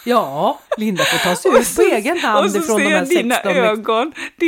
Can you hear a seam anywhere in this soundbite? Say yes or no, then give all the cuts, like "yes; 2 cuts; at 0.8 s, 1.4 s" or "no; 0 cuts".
no; 0 cuts